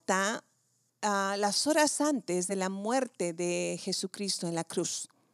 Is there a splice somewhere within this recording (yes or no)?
no